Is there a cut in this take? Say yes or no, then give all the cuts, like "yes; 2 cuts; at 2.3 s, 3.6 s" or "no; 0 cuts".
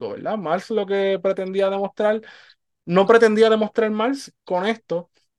no; 0 cuts